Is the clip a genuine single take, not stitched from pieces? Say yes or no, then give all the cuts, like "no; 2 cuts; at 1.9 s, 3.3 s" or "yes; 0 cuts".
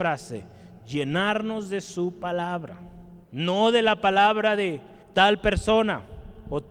no; 2 cuts; at 3.2 s, 5.0 s